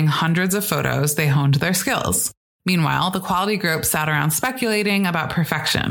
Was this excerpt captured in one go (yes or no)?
no